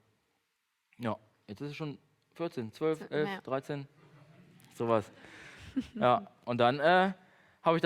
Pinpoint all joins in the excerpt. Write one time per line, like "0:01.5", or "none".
none